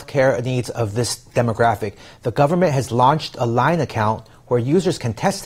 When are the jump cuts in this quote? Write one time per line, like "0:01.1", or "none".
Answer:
none